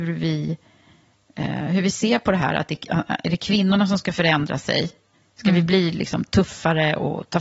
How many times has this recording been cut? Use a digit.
0